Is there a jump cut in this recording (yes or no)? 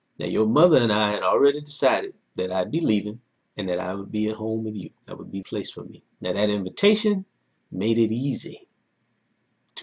yes